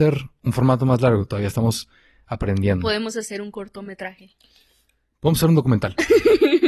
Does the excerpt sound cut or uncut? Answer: uncut